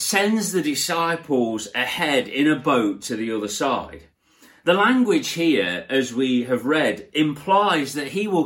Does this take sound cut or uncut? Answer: uncut